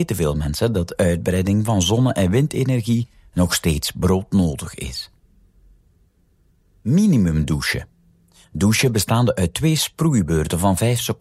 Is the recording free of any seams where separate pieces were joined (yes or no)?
yes